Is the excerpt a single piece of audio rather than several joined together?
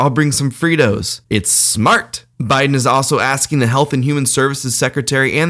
yes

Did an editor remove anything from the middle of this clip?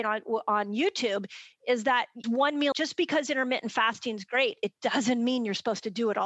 yes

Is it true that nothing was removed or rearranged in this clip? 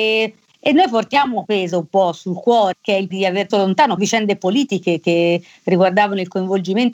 no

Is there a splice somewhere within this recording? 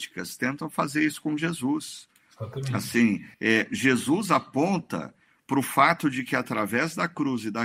yes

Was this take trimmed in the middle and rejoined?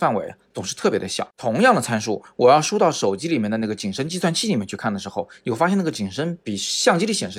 yes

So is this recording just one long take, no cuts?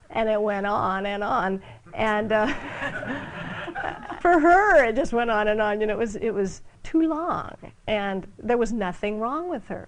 no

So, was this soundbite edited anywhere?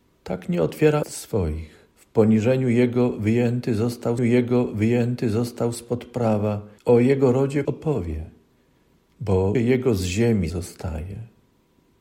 yes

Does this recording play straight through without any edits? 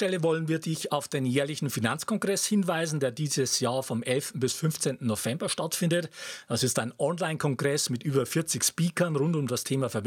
yes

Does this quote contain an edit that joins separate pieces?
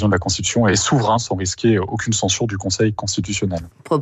no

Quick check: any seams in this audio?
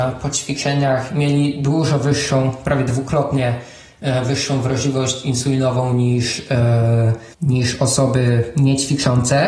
yes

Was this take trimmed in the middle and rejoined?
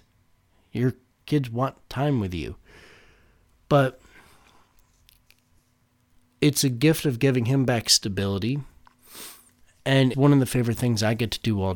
yes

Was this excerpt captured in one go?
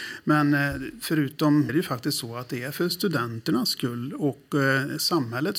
no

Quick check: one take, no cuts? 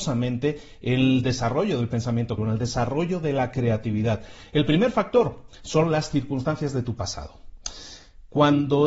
no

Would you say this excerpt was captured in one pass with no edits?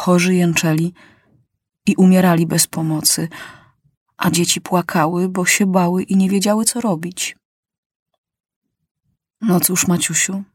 yes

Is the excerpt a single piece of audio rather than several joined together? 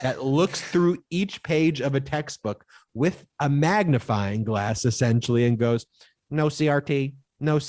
yes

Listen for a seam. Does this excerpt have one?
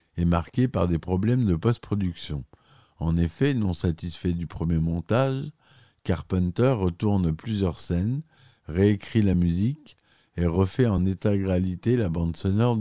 no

